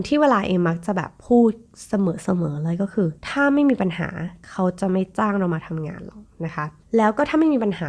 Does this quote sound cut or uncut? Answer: cut